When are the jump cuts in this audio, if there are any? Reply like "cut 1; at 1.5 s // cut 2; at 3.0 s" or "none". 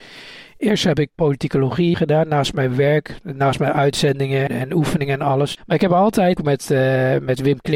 cut 1; at 1.1 s // cut 2; at 1.9 s // cut 3; at 4.5 s // cut 4; at 6.4 s